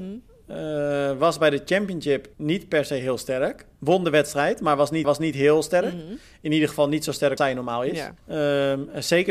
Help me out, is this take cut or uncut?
cut